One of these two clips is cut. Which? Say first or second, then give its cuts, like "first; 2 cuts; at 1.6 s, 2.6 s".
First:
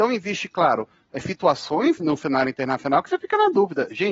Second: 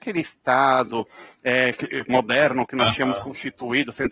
first; 1 cut; at 2.0 s